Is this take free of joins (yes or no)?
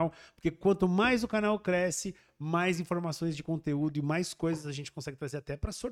yes